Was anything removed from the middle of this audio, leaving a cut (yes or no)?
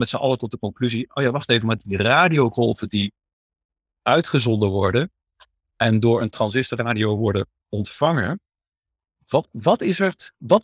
no